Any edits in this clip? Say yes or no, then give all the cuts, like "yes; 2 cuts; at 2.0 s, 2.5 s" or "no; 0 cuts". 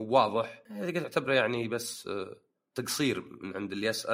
no; 0 cuts